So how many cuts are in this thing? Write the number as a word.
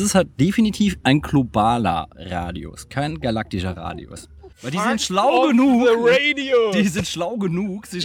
two